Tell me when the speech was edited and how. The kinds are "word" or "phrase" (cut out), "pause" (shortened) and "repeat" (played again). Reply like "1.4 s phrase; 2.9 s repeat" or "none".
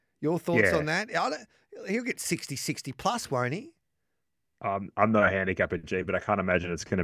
none